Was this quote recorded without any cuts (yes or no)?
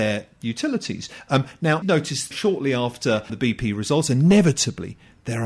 no